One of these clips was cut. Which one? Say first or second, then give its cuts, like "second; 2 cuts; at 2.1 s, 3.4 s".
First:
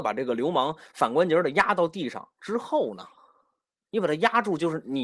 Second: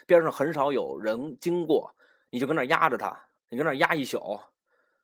second; 1 cut; at 3.4 s